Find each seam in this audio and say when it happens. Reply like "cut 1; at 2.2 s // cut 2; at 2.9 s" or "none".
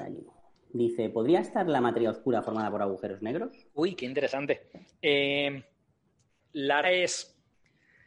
cut 1; at 3.7 s // cut 2; at 6.8 s